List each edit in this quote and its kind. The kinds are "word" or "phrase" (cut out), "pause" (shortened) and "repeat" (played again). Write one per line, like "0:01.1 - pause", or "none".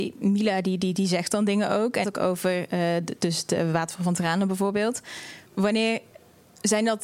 0:02.0 - phrase
0:05.5 - pause